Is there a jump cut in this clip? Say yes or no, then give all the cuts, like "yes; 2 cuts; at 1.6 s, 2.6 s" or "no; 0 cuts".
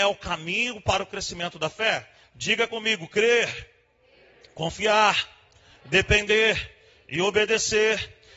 no; 0 cuts